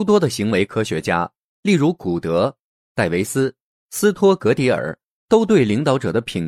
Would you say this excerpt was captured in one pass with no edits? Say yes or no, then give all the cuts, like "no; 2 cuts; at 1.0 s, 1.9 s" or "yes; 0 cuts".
yes; 0 cuts